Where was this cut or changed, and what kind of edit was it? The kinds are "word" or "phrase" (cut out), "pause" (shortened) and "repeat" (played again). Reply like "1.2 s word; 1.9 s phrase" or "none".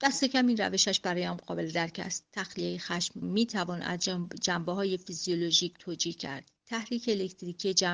3.2 s word; 6.6 s pause